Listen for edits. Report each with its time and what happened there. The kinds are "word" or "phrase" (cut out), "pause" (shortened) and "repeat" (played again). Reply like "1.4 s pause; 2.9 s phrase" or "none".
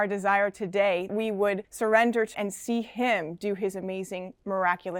1.1 s word; 1.6 s pause; 2.3 s word